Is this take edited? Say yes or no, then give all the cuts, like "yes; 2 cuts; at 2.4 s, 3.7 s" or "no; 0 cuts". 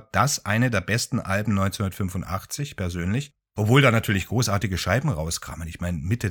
no; 0 cuts